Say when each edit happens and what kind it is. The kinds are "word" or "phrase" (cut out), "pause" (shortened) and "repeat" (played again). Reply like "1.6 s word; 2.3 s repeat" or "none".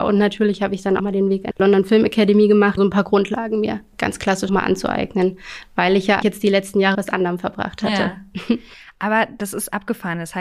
1.0 s word; 1.5 s word; 2.8 s word; 3.9 s word; 4.5 s word; 6.2 s word; 6.9 s word